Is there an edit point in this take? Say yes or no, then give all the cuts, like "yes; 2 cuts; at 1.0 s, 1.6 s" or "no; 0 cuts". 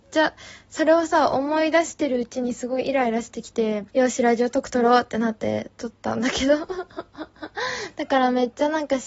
yes; 1 cut; at 3.9 s